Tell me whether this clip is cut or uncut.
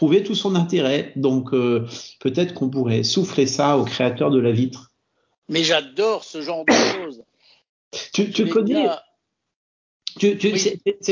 uncut